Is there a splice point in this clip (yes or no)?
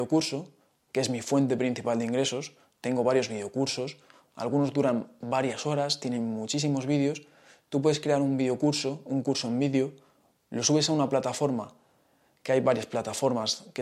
no